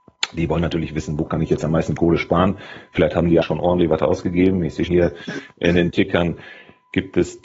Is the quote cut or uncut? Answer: cut